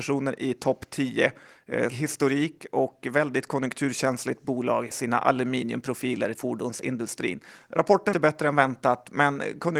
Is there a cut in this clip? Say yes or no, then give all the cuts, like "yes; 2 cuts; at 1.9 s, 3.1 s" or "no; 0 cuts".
yes; 4 cuts; at 1.9 s, 4.9 s, 6.3 s, 8.1 s